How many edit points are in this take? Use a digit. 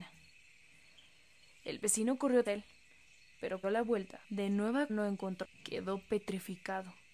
5